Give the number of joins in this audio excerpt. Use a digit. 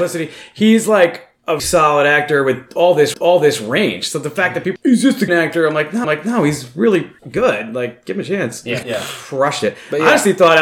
7